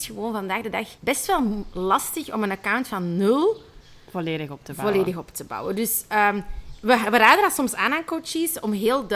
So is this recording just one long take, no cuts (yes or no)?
no